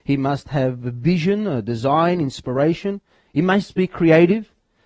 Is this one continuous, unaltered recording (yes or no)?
yes